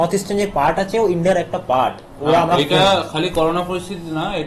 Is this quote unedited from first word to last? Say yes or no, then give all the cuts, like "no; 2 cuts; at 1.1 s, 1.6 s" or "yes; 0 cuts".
yes; 0 cuts